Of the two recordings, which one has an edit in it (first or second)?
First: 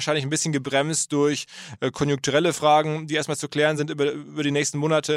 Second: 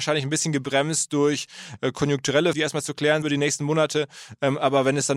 second